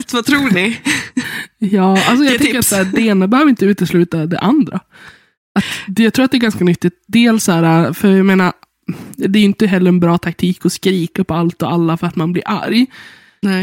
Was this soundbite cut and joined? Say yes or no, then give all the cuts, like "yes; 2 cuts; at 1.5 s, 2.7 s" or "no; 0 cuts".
no; 0 cuts